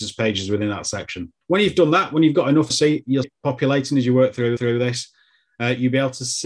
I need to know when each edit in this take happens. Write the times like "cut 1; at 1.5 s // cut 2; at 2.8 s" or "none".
cut 1; at 1.4 s // cut 2; at 2.7 s // cut 3; at 3.2 s // cut 4; at 4.6 s